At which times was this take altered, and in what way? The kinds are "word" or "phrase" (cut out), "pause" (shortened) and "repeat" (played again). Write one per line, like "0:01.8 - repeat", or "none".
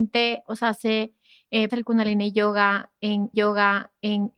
0:01.7 - word
0:03.3 - repeat

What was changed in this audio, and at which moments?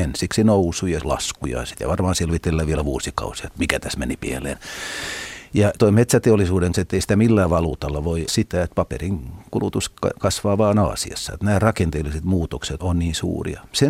0:01.0 - word
0:05.8 - word
0:06.7 - word
0:08.3 - word
0:12.8 - word

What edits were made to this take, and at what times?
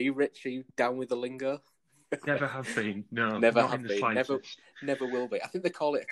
none

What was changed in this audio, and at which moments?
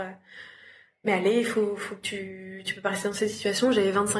none

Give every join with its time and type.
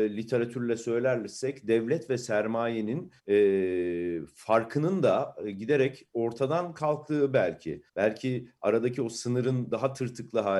0:03.2 - pause
0:07.9 - pause

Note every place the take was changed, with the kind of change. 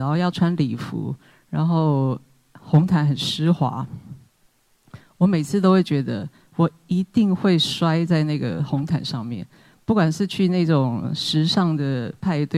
none

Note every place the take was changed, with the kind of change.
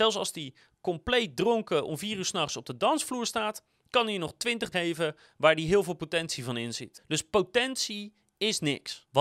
0:04.7 - word

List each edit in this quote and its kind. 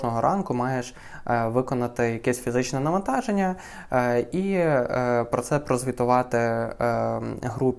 none

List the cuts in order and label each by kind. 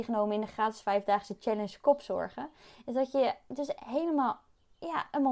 0:03.8 - word

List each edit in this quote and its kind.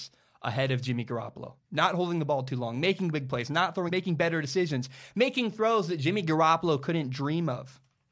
0:01.6 - pause
0:03.9 - word

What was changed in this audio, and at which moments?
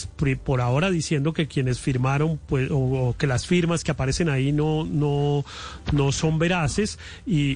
none

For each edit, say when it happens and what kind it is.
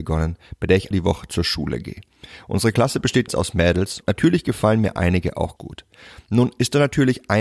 0:00.9 - word
0:03.3 - word
0:04.0 - word
0:05.6 - word

